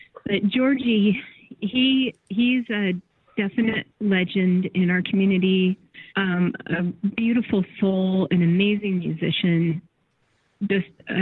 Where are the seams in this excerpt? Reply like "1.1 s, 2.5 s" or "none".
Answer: 6.1 s

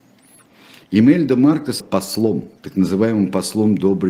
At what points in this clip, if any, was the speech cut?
1.8 s, 2.6 s

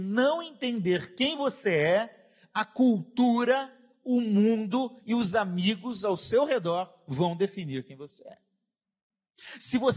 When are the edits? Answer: none

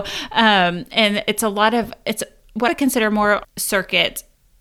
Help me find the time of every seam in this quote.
2.7 s, 3.4 s

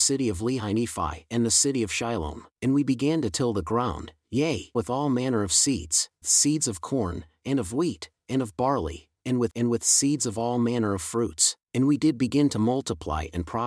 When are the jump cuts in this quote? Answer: 2.5 s, 4.7 s, 6.2 s, 9.1 s, 9.5 s, 11.6 s

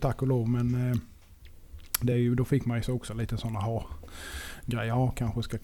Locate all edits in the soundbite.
none

